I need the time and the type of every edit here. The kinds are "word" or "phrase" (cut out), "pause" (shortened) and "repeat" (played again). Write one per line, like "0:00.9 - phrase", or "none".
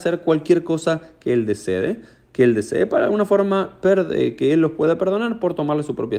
none

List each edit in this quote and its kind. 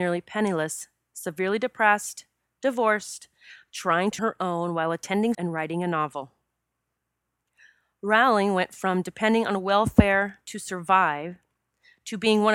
0:04.2 - phrase
0:05.3 - word

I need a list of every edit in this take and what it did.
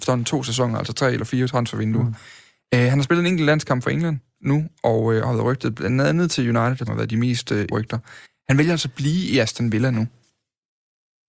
0:06.9 - word
0:07.7 - word
0:08.2 - pause

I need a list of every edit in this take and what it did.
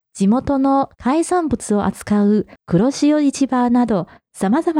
0:02.6 - pause

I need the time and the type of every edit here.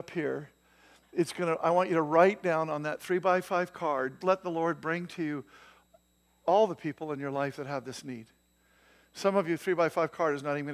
0:04.2 - word

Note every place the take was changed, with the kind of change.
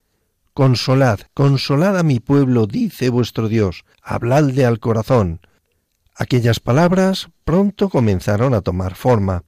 0:01.3 - pause
0:03.9 - pause

